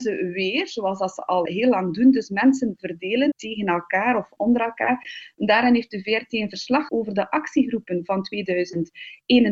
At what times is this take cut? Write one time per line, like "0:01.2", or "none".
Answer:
0:01.5
0:03.3
0:04.4
0:06.9